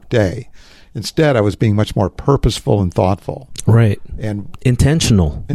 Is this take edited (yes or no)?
no